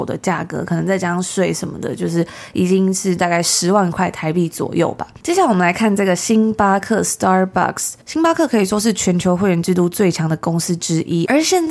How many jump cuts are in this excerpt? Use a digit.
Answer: 1